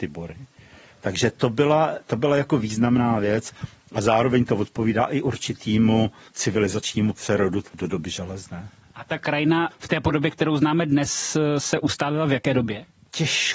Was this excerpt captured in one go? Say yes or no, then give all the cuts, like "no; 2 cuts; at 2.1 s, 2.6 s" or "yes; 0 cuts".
yes; 0 cuts